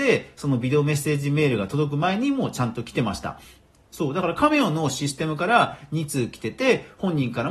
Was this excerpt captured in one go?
yes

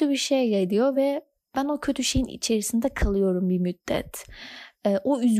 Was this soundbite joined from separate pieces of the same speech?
no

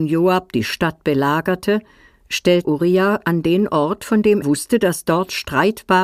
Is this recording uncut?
no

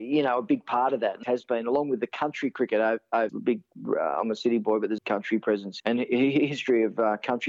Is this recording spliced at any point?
yes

